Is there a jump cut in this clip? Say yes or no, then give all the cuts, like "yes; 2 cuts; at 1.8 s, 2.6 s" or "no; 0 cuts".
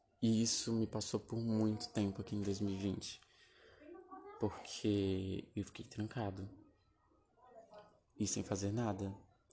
no; 0 cuts